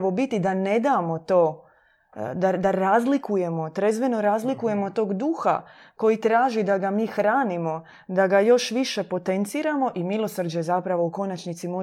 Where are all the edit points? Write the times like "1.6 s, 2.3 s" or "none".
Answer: none